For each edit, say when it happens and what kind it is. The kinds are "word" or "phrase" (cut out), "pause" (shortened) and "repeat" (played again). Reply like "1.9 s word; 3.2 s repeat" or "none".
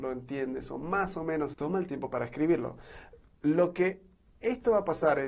1.5 s phrase